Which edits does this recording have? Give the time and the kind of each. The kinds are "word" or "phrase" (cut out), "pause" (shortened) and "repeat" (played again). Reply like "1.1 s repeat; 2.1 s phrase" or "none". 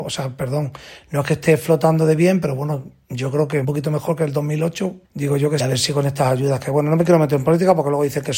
3.6 s word; 5.0 s pause; 5.6 s phrase